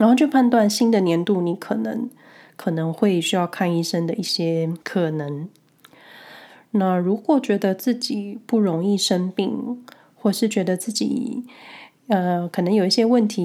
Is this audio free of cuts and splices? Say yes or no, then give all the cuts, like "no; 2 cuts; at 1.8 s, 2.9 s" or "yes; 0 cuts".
no; 1 cut; at 4.8 s